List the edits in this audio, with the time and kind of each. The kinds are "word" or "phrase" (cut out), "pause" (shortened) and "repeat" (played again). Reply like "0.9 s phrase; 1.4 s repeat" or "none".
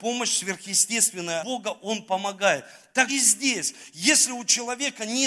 1.4 s word; 3.1 s word